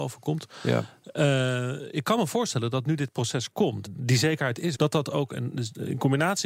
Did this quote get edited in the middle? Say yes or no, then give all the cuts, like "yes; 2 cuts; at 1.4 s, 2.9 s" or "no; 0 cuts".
yes; 2 cuts; at 3.9 s, 4.7 s